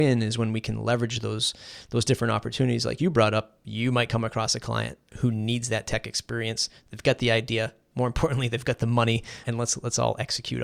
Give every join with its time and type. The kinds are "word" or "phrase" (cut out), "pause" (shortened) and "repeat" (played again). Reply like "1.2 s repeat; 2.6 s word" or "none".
9.4 s word